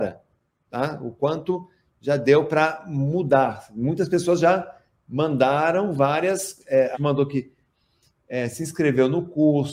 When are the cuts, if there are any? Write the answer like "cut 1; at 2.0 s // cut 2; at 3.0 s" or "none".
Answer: cut 1; at 6.9 s